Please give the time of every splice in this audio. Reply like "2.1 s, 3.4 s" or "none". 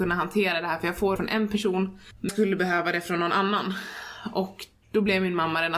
1.2 s, 2.3 s

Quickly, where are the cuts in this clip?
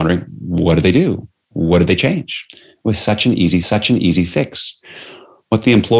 3.6 s

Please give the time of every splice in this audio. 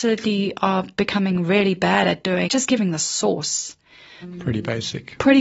2.5 s

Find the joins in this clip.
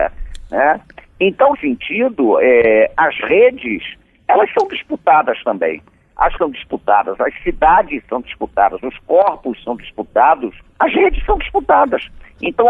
1.5 s, 6.4 s

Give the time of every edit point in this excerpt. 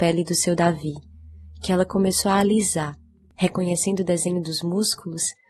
none

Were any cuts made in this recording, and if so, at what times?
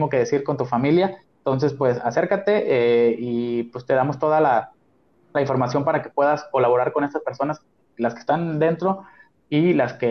none

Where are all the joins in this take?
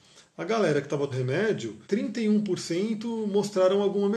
1.1 s, 1.8 s

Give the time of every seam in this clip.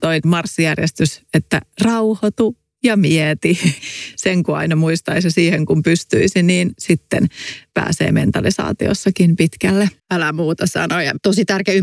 10.0 s

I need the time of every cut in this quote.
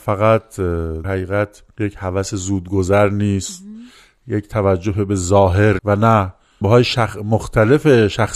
1.0 s, 5.8 s, 6.6 s

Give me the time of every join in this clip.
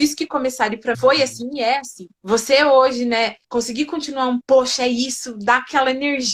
0.9 s, 2.2 s, 3.4 s, 4.4 s

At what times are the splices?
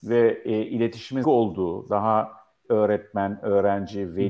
1.2 s, 2.6 s

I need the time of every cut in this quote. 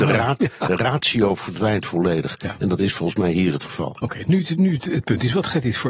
none

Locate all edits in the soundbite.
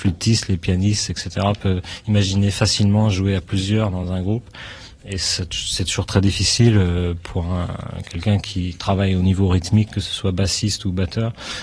none

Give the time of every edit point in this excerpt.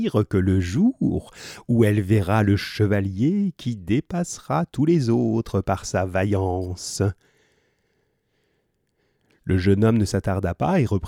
none

